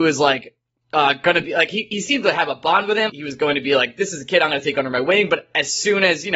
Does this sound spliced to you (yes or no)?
yes